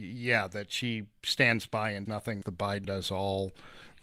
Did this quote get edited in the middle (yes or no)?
yes